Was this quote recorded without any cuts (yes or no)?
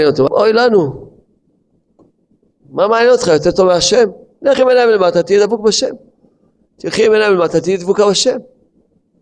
yes